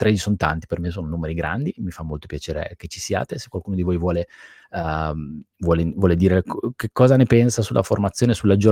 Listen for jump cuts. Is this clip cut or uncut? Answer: cut